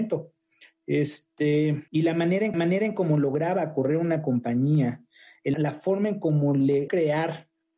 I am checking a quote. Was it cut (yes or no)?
yes